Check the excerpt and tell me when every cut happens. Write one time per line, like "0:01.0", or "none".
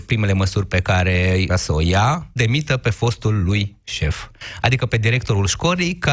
0:01.5
0:02.4